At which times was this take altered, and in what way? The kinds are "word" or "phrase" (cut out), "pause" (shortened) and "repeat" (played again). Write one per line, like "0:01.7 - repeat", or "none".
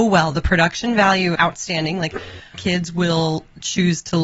0:01.4 - phrase
0:02.5 - word